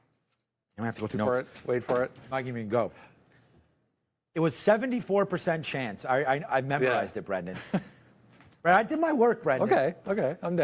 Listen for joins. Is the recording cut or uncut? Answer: cut